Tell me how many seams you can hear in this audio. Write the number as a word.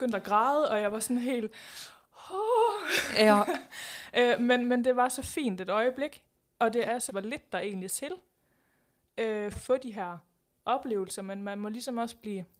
three